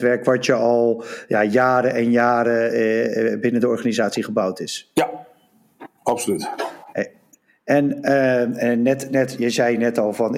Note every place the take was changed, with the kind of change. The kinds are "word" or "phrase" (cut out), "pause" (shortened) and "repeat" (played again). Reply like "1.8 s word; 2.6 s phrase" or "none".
none